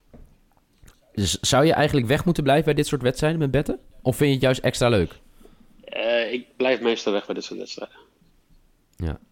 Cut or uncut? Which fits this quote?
uncut